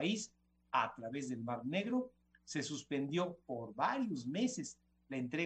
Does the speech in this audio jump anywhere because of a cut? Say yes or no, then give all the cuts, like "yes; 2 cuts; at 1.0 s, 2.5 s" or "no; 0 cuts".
no; 0 cuts